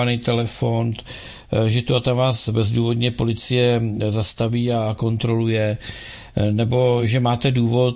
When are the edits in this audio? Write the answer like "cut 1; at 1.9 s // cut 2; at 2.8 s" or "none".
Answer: none

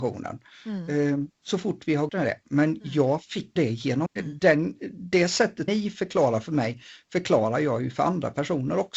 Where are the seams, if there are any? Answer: cut 1; at 2.1 s // cut 2; at 3.6 s // cut 3; at 4.1 s // cut 4; at 5.7 s

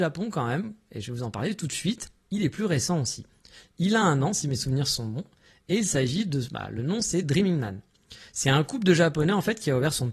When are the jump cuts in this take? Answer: none

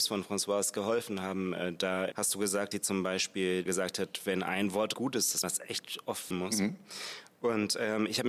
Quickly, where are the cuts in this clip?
cut 1; at 2.1 s // cut 2; at 2.7 s // cut 3; at 3.7 s // cut 4; at 4.9 s // cut 5; at 5.4 s // cut 6; at 6.3 s

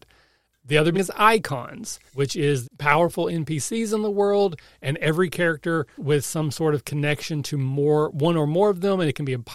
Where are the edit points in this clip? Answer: cut 1; at 0.9 s // cut 2; at 2.1 s // cut 3; at 2.6 s // cut 4; at 6.0 s

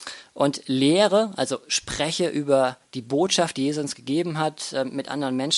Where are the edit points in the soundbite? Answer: none

